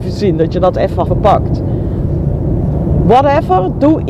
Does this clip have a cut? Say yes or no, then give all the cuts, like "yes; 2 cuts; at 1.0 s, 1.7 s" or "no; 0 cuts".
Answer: yes; 1 cut; at 1.1 s